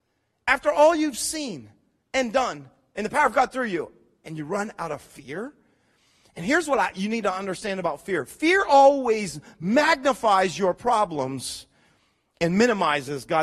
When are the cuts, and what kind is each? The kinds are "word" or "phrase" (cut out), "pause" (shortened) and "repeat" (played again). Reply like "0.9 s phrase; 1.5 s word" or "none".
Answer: none